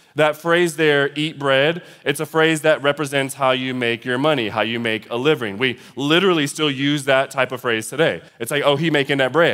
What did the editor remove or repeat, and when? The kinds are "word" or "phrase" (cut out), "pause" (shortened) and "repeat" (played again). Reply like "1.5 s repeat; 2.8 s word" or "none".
8.3 s pause